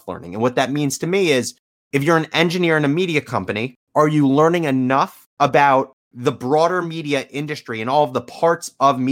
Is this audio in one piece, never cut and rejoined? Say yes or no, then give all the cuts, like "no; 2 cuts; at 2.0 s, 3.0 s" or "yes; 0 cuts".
yes; 0 cuts